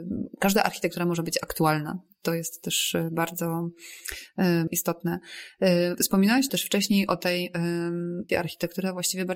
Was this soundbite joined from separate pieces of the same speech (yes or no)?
yes